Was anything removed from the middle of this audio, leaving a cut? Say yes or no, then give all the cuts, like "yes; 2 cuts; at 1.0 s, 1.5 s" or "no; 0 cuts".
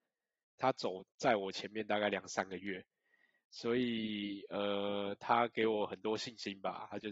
no; 0 cuts